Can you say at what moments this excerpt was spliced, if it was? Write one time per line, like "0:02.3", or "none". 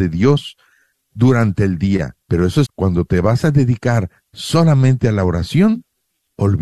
0:02.2
0:02.7